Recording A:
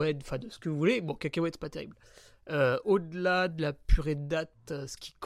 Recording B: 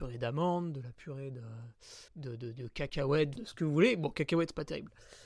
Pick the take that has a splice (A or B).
B